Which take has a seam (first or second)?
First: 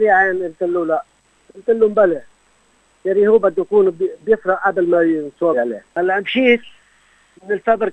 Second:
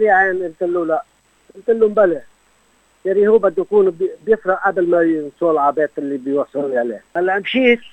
first